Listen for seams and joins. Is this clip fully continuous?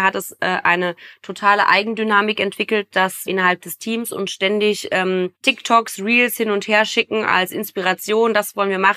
no; 2 cuts; at 3.3 s, 5.3 s

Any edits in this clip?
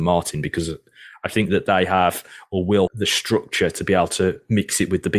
yes; 1 cut; at 2.9 s

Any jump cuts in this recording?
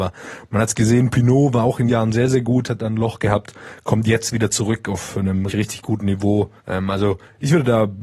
yes; 3 cuts; at 1.9 s, 5.5 s, 6.6 s

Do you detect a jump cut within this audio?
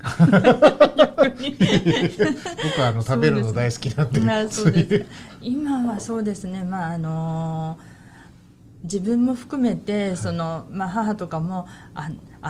no; 0 cuts

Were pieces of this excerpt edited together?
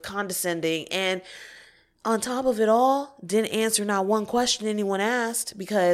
no; 0 cuts

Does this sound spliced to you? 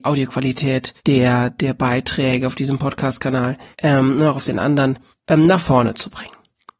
yes; 3 cuts; at 1.0 s, 3.7 s, 5.1 s

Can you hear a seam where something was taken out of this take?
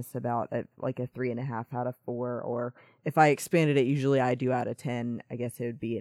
no; 0 cuts

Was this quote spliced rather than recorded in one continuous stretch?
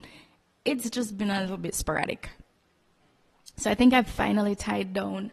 no; 0 cuts

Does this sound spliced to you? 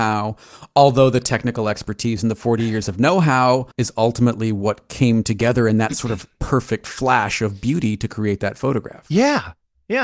yes; 1 cut; at 3.7 s

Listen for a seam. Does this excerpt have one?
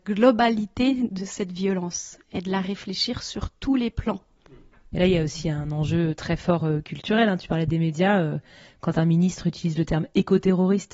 no; 0 cuts

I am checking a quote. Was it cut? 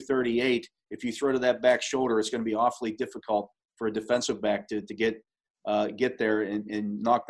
no; 0 cuts

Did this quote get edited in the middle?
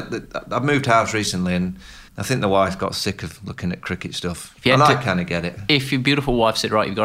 yes; 1 cut; at 2.1 s

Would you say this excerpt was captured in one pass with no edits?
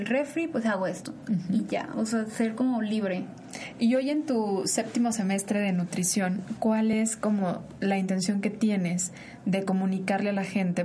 yes; 0 cuts

